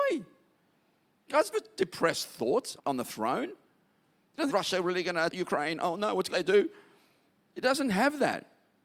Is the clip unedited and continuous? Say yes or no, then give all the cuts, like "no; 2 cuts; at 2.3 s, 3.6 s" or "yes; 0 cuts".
no; 5 cuts; at 1.5 s, 2.8 s, 4.5 s, 5.3 s, 6.3 s